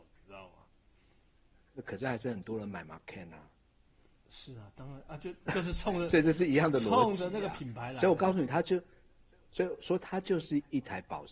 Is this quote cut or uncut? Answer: uncut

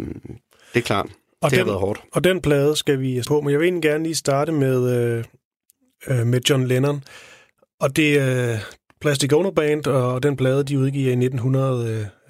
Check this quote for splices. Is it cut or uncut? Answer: cut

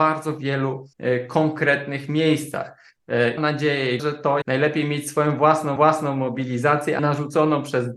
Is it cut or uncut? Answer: cut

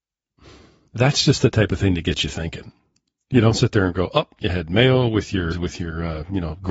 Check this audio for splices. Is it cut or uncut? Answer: cut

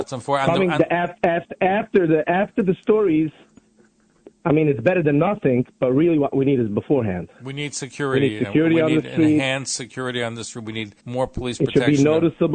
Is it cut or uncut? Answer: cut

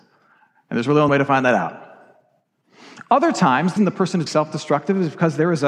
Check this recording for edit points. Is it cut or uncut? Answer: cut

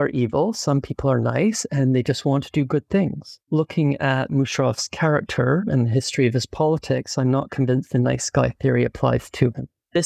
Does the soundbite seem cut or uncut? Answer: uncut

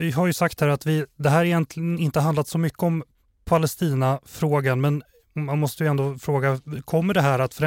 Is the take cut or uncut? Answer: uncut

